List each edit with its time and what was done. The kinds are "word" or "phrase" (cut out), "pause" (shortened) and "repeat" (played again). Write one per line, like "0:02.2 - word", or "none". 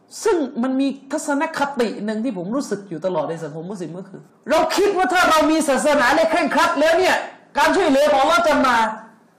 0:04.3 - pause